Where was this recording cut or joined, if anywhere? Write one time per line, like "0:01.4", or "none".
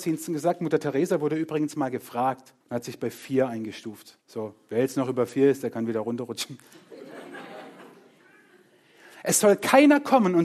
0:02.6
0:04.2